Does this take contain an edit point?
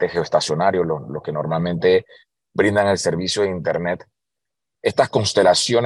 no; 0 cuts

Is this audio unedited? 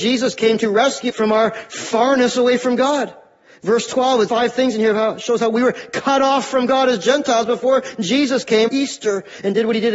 no; 3 cuts; at 1.1 s, 4.3 s, 8.7 s

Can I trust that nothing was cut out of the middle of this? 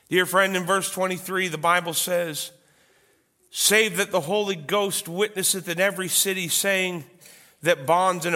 yes; 0 cuts

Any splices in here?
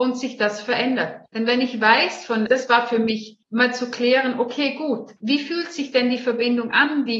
yes; 4 cuts; at 1.3 s, 2.5 s, 3.4 s, 5.2 s

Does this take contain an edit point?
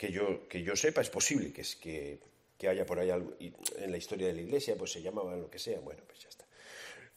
no; 0 cuts

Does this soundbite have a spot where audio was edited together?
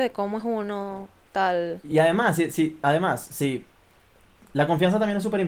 no; 0 cuts

